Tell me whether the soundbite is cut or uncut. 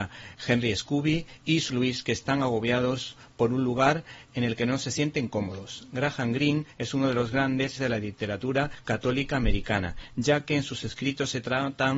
cut